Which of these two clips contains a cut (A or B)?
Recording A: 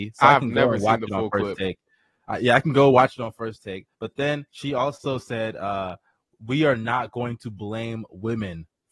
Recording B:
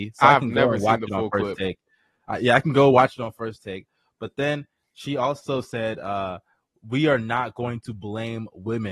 A